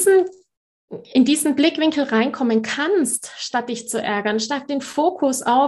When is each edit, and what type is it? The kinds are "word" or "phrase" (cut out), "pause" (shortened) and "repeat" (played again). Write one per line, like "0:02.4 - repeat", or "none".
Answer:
none